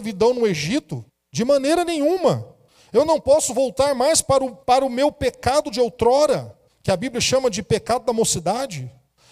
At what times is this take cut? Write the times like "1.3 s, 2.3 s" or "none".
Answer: 1.1 s, 2.7 s, 4.6 s, 6.7 s